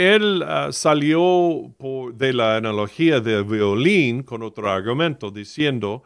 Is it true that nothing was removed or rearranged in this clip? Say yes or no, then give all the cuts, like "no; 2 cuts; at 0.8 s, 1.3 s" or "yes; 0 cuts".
yes; 0 cuts